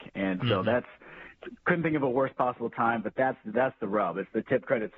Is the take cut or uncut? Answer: uncut